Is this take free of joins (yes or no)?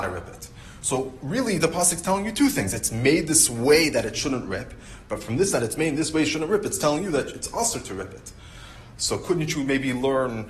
yes